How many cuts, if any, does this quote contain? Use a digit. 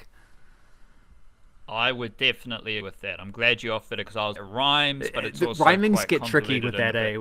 3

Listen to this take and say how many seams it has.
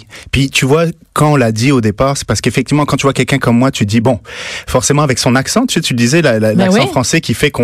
0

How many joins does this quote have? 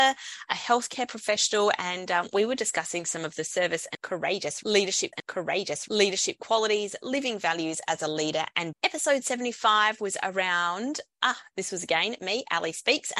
2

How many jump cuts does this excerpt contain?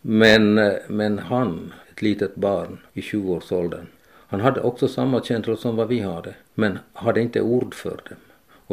4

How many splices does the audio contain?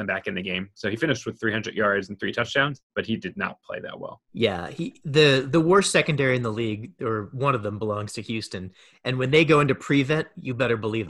2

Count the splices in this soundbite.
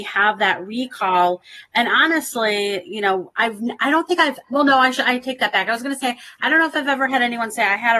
1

